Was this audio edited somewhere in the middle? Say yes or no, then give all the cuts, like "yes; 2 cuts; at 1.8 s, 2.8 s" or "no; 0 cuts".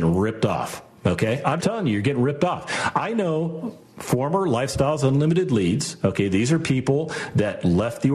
yes; 1 cut; at 1.6 s